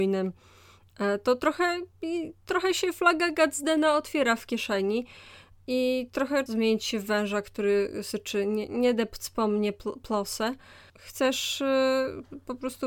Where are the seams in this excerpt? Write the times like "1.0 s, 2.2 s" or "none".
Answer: 6.5 s